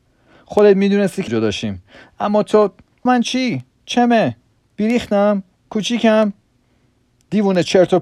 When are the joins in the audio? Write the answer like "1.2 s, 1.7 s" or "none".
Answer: 1.3 s, 3.1 s